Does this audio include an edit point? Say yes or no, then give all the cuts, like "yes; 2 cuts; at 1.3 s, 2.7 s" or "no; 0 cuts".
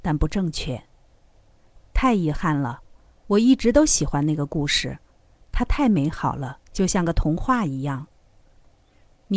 yes; 1 cut; at 6.7 s